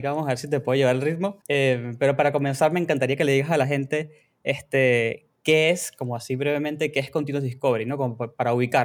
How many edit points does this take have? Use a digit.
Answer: 1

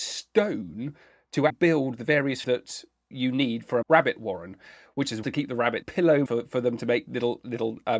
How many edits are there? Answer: 7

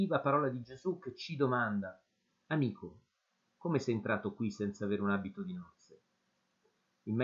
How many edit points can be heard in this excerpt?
0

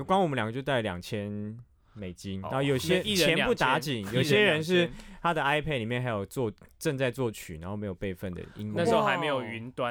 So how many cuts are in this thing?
0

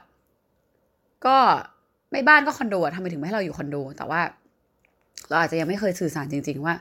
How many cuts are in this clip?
0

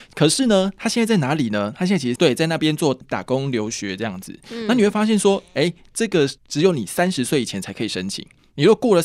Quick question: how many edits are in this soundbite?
2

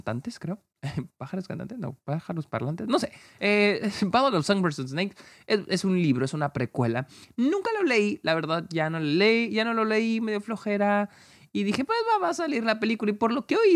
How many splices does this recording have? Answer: 0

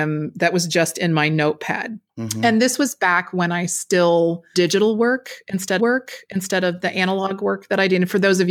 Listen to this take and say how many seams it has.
3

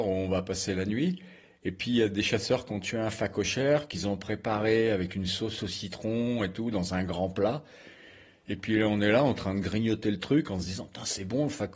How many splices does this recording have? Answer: 0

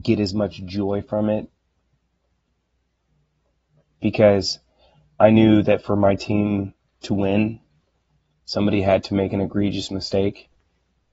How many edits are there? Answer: 0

